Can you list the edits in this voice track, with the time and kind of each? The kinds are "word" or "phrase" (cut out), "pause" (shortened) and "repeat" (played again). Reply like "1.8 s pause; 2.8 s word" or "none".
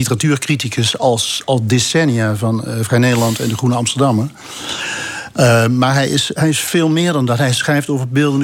none